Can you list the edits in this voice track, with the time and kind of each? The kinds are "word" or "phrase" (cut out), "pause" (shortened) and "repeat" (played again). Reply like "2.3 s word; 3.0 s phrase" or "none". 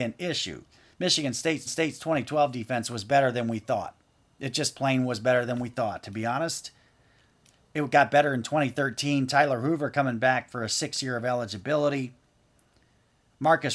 1.7 s repeat